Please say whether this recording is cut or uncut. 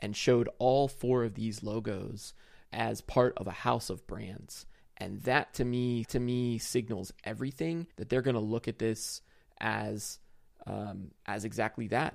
cut